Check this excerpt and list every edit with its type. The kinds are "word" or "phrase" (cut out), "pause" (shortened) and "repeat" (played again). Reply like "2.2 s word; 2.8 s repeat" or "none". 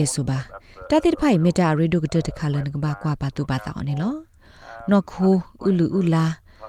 none